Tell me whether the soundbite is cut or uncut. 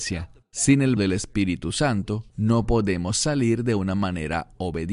cut